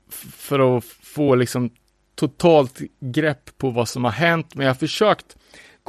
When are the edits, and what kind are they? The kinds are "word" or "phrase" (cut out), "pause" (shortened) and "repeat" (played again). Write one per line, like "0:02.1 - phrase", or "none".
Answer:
none